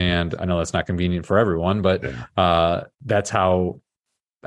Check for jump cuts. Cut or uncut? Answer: cut